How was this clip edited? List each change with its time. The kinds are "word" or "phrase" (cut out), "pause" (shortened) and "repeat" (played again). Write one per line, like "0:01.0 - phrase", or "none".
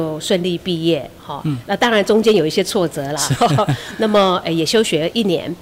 none